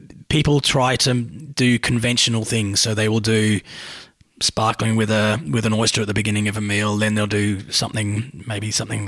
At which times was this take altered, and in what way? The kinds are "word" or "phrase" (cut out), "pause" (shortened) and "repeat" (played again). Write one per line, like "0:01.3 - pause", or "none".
none